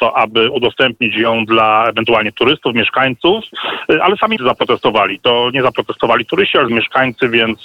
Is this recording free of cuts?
no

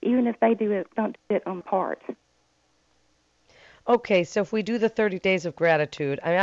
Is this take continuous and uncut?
no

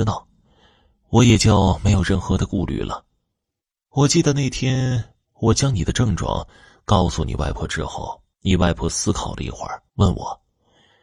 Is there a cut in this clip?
yes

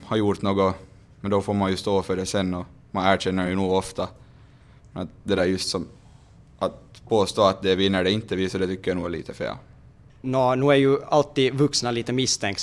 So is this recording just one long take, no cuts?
yes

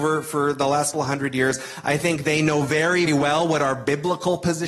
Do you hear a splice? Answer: yes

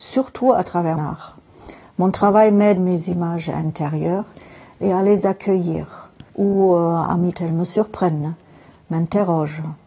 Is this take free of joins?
no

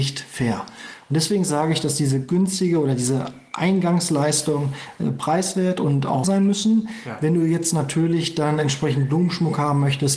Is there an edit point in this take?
yes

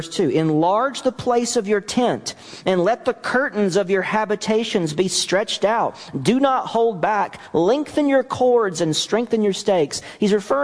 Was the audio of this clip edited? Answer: no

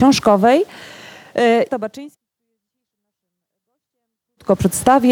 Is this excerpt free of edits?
no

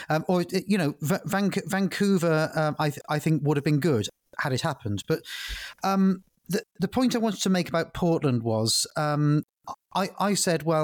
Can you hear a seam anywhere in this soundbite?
no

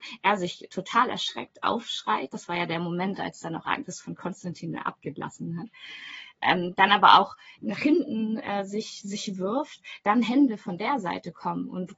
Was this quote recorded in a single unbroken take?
no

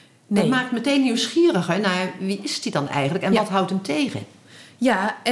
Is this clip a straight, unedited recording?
yes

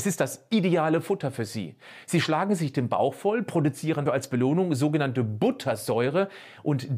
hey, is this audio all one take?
no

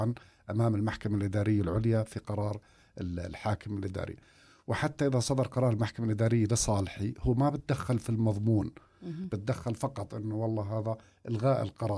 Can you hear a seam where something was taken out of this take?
no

